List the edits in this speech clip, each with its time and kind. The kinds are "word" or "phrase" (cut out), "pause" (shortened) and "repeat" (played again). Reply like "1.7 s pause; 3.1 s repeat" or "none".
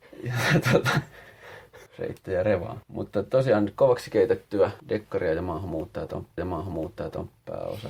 1.9 s pause; 2.8 s pause; 4.8 s pause; 6.4 s repeat